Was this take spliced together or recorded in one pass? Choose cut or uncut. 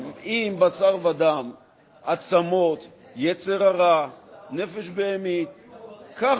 uncut